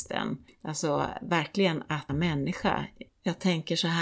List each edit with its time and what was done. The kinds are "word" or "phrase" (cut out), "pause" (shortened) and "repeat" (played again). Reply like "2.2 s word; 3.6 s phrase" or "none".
2.1 s word; 3.1 s phrase